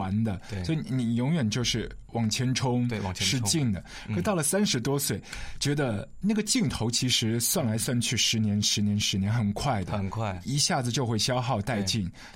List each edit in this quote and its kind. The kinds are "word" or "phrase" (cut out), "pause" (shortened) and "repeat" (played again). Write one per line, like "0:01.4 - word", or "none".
none